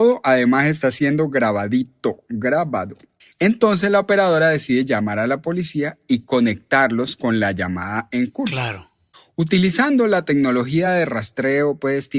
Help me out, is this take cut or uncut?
uncut